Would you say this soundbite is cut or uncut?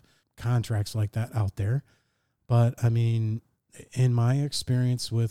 uncut